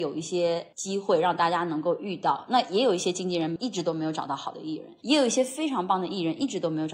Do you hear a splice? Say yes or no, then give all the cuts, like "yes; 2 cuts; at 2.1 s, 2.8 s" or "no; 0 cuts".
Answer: yes; 1 cut; at 5.0 s